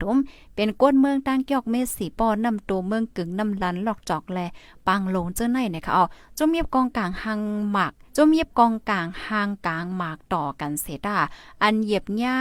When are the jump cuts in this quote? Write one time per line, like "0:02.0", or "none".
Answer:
0:08.1